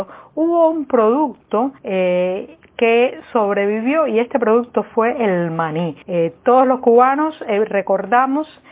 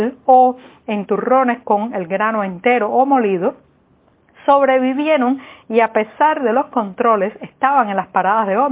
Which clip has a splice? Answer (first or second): first